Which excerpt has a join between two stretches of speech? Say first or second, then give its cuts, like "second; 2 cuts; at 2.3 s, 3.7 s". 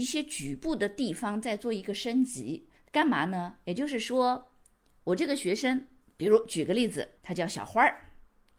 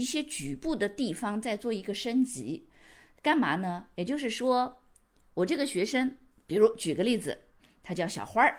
first; 2 cuts; at 2.8 s, 7.2 s